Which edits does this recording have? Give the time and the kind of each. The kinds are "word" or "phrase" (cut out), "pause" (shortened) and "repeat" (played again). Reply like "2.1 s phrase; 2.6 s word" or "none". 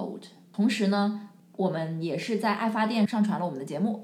none